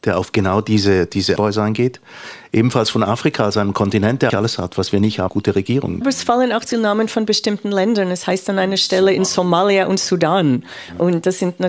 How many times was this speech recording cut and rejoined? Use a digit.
5